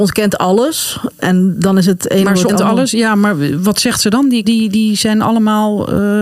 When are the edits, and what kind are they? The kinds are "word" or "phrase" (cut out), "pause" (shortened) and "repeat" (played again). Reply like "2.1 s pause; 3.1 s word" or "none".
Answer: 2.5 s word; 4.4 s word